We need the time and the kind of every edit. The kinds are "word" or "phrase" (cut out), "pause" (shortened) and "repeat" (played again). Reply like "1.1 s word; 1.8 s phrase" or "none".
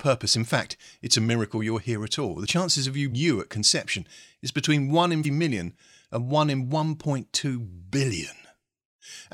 3.1 s word; 5.2 s word